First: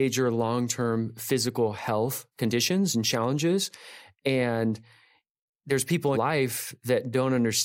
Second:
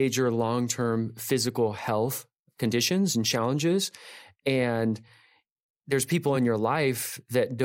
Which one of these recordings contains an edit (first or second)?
first